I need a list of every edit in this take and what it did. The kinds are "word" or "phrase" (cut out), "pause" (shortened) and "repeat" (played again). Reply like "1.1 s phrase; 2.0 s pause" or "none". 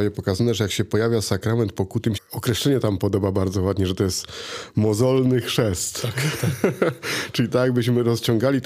2.2 s phrase